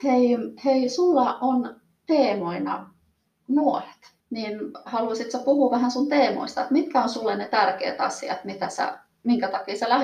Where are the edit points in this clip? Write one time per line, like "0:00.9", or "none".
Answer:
0:04.2